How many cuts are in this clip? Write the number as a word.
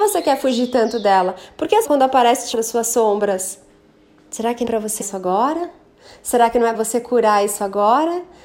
five